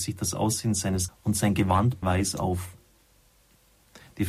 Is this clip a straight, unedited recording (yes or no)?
no